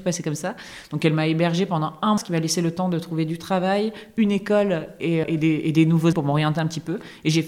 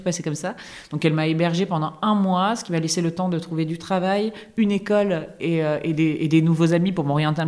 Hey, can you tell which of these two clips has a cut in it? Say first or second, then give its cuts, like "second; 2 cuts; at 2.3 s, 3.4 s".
first; 3 cuts; at 2.2 s, 5.2 s, 6.1 s